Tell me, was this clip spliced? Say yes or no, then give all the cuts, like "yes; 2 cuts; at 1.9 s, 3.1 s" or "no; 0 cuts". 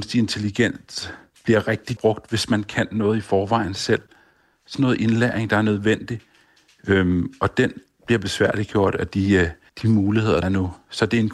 yes; 4 cuts; at 2.0 s, 4.7 s, 9.7 s, 10.4 s